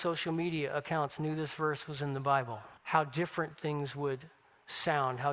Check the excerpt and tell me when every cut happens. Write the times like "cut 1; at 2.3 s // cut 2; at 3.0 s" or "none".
cut 1; at 2.8 s